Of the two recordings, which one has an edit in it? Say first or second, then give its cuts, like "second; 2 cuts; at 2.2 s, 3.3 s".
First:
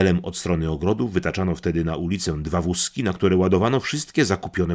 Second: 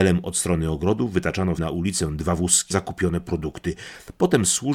second; 2 cuts; at 1.6 s, 2.7 s